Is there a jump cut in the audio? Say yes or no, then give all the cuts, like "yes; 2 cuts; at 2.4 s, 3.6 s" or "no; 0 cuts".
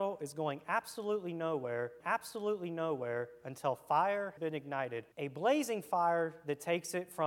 yes; 3 cuts; at 2.0 s, 4.4 s, 5.1 s